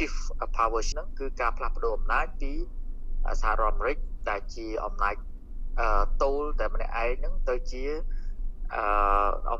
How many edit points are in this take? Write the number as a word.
one